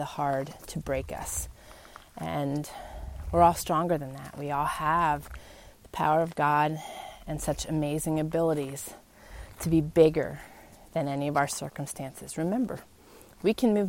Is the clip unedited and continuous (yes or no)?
yes